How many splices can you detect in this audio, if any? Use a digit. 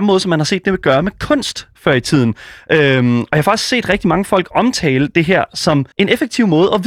1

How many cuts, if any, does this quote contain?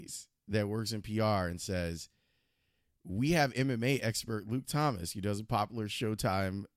0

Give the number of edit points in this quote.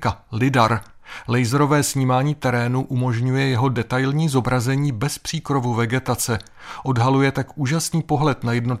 0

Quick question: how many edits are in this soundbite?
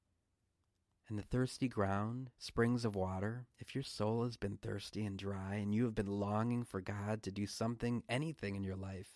2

